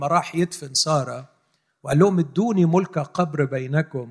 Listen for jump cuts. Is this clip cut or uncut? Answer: uncut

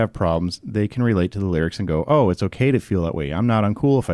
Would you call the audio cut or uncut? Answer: uncut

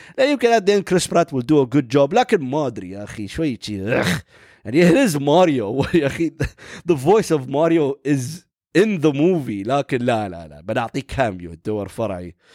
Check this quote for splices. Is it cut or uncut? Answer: uncut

